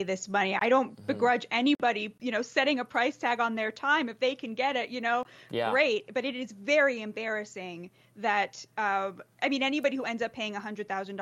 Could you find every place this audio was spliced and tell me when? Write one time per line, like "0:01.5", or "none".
none

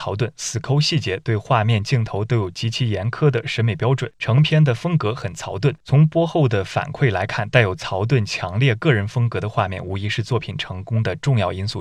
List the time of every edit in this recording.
none

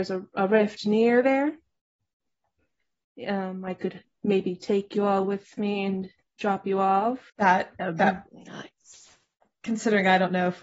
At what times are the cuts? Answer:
0:04.0
0:07.3

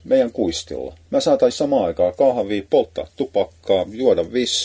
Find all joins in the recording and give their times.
0:01.5

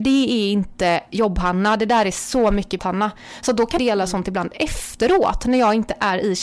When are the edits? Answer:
0:02.8
0:03.8

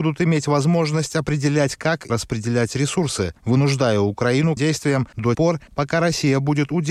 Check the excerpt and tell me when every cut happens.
0:02.1
0:04.6
0:05.3

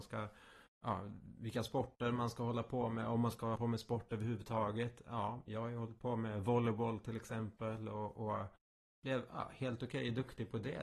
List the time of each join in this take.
0:03.6
0:05.5

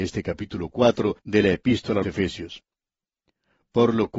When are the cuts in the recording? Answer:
0:01.2
0:02.0

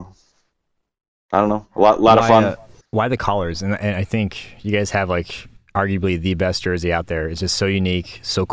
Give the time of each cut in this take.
0:02.8
0:05.6

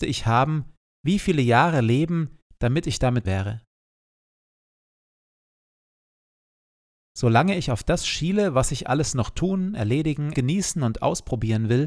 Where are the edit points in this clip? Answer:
0:03.2
0:10.3

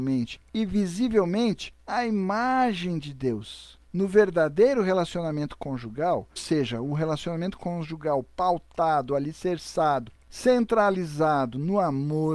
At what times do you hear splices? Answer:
0:03.8
0:06.4

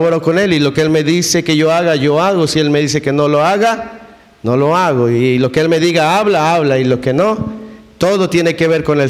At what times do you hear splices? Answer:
none

